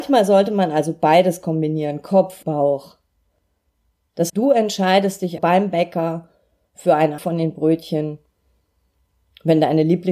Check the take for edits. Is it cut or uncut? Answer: cut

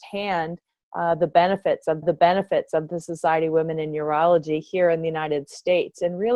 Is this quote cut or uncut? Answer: cut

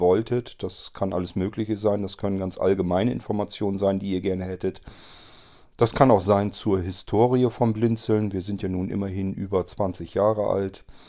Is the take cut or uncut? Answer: uncut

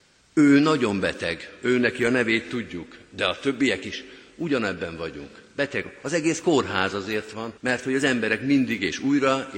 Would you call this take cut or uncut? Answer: cut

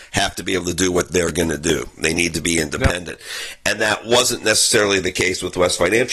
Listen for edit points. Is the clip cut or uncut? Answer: uncut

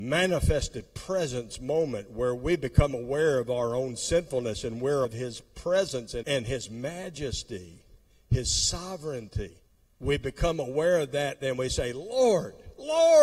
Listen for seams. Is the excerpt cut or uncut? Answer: cut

